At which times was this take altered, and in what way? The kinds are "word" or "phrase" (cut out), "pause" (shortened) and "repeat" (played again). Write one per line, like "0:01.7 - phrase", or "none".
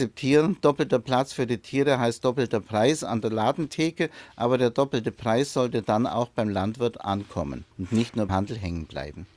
0:07.7 - pause
0:08.3 - word